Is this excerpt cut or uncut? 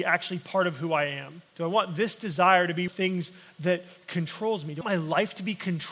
cut